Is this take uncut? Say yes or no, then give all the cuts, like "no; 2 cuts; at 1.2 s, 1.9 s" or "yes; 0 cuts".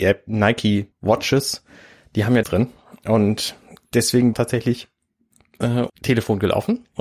no; 4 cuts; at 0.9 s, 2.4 s, 4.3 s, 5.9 s